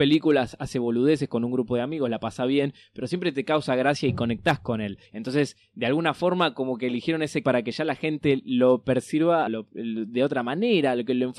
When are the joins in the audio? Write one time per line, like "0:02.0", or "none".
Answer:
0:05.0
0:07.4
0:09.5